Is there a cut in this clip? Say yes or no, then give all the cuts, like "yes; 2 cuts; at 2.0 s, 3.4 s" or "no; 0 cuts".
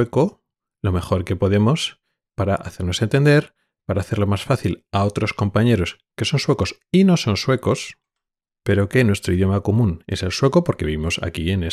no; 0 cuts